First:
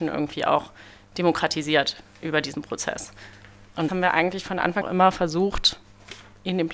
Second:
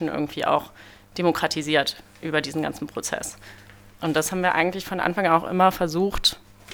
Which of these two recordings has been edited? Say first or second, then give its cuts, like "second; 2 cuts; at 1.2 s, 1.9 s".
first; 3 cuts; at 2.5 s, 3.9 s, 4.8 s